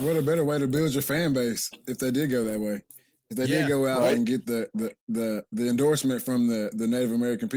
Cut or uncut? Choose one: uncut